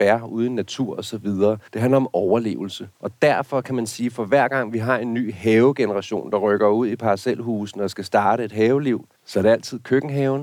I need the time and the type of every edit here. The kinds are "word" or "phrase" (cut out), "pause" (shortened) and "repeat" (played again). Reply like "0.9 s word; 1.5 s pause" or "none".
1.7 s pause; 2.9 s pause; 9.1 s pause